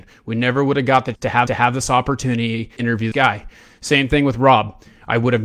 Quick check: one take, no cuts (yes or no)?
no